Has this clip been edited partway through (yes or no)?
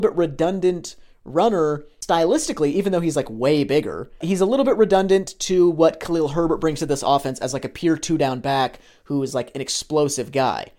no